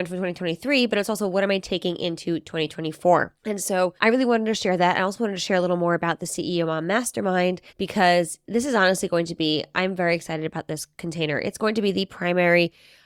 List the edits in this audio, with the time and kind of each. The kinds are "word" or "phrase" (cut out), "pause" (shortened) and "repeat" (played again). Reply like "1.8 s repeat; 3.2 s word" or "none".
3.4 s pause; 4.0 s pause; 7.7 s pause